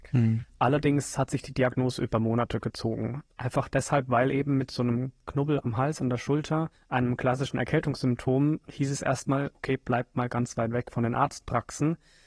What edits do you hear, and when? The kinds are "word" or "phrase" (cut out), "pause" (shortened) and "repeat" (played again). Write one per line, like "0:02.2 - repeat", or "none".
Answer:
0:03.3 - pause
0:06.8 - pause